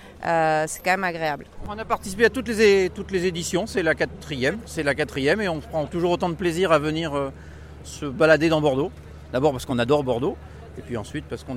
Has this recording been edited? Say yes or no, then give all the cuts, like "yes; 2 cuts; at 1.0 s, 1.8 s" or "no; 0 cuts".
no; 0 cuts